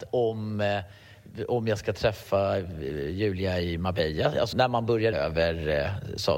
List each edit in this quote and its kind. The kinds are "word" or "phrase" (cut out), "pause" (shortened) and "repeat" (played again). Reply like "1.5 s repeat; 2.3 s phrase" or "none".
4.5 s word; 5.1 s word